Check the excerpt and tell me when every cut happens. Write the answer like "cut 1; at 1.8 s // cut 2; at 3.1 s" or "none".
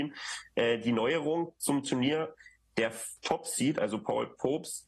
none